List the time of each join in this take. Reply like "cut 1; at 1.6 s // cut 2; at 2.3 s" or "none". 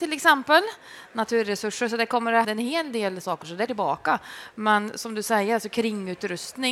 cut 1; at 2.4 s // cut 2; at 3.2 s // cut 3; at 3.7 s